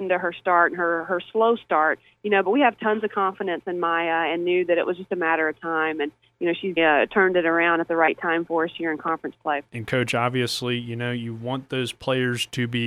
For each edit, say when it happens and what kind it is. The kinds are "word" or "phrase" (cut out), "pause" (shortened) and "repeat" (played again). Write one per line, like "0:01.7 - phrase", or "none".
0:06.8 - word
0:09.7 - pause